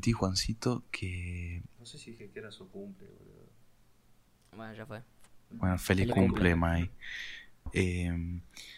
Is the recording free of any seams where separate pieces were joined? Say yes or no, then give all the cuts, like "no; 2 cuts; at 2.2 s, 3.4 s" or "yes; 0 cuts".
yes; 0 cuts